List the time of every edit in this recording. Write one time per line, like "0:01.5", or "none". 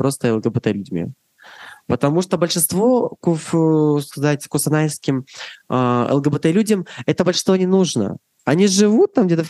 none